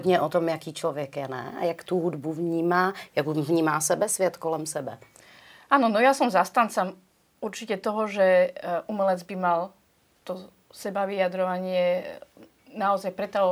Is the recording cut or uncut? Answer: uncut